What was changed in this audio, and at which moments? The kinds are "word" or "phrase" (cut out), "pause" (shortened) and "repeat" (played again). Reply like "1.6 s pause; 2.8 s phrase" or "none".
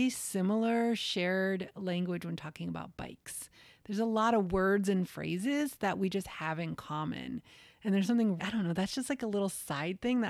8.4 s word